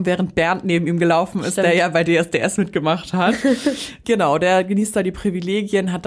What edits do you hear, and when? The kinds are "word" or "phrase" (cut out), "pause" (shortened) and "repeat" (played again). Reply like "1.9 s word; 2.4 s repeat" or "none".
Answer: 4.0 s word